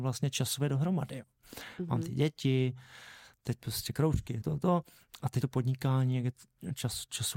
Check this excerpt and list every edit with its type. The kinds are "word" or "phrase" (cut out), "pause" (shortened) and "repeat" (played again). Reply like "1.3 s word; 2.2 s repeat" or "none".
4.4 s word; 5.4 s word